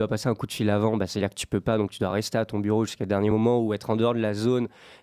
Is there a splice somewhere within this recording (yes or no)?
no